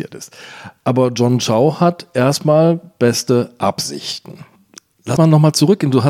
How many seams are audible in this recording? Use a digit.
1